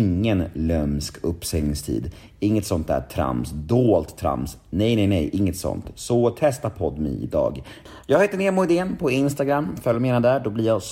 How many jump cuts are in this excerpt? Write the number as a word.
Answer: zero